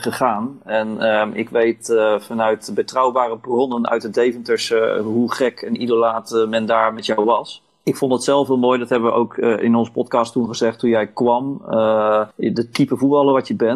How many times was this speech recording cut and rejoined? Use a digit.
1